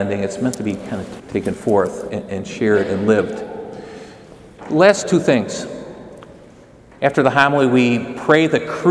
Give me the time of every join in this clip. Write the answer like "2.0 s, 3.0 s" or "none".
1.2 s, 2.1 s, 5.0 s